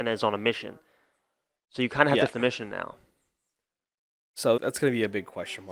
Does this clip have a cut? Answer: yes; 2 cuts; at 2.3 s, 4.6 s

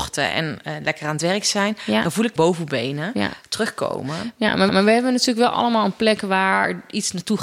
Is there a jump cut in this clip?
yes; 2 cuts; at 2.4 s, 4.7 s

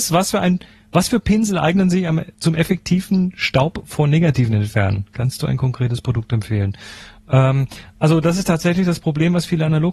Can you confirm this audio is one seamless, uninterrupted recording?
yes; 0 cuts

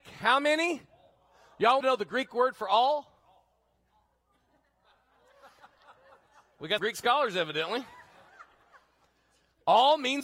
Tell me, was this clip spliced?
yes; 2 cuts; at 1.8 s, 6.8 s

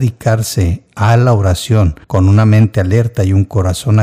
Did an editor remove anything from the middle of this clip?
yes; 1 cut; at 2.0 s

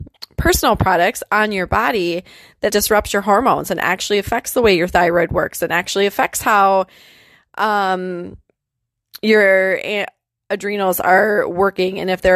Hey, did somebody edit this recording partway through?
yes; 1 cut; at 2.7 s

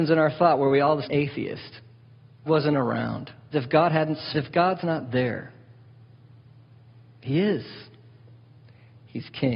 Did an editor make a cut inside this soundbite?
yes; 4 cuts; at 1.0 s, 2.5 s, 3.5 s, 4.3 s

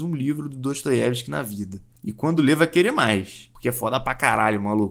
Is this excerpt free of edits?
yes; 0 cuts

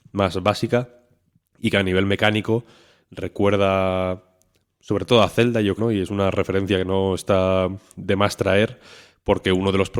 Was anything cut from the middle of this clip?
yes; 1 cut; at 5.8 s

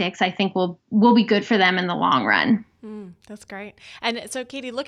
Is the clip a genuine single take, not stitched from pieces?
yes; 0 cuts

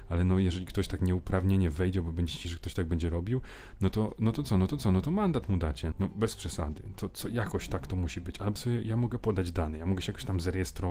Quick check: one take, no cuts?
no; 4 cuts; at 2.4 s, 4.7 s, 5.9 s, 8.6 s

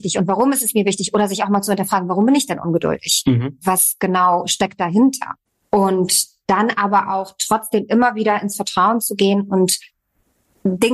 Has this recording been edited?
yes; 1 cut; at 5.5 s

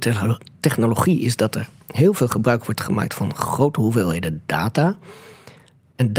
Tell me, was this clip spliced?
no; 0 cuts

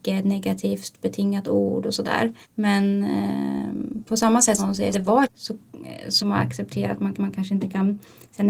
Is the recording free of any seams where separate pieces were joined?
no; 6 cuts; at 2.4 s, 4.6 s, 4.9 s, 5.2 s, 6.2 s, 7.1 s

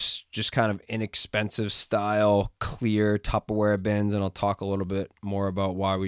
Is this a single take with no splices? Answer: yes; 0 cuts

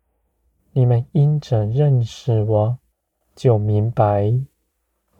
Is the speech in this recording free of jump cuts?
no; 1 cut; at 2.9 s

